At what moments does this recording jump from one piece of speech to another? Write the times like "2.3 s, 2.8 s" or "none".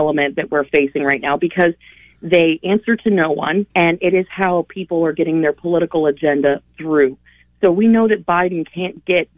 3.7 s